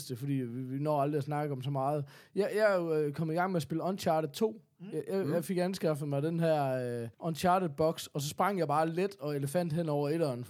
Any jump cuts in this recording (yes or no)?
yes